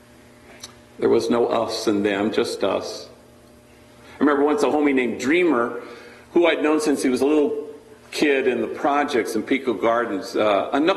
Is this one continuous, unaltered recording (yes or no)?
yes